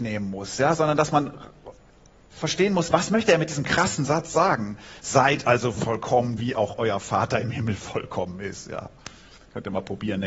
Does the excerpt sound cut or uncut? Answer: uncut